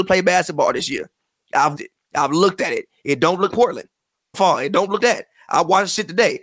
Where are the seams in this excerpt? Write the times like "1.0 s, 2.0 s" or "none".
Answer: 1.8 s, 3.5 s, 4.3 s, 5.0 s